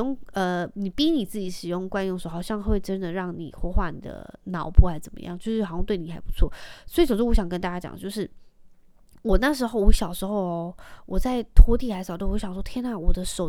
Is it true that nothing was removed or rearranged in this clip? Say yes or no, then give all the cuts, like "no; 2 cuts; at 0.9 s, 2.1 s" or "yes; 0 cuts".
yes; 0 cuts